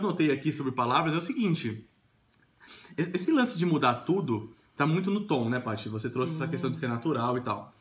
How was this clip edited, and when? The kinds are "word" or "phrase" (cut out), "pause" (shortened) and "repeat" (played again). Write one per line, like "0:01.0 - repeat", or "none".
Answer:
none